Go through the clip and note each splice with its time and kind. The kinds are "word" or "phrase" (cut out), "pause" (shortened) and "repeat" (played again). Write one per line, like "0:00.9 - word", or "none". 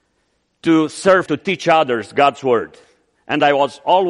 0:01.3 - phrase